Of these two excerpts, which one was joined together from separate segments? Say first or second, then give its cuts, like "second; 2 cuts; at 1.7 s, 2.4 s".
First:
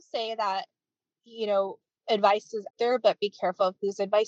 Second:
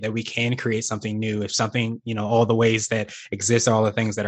first; 1 cut; at 2.7 s